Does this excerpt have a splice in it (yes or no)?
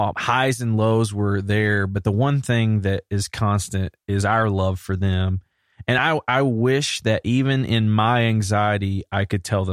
no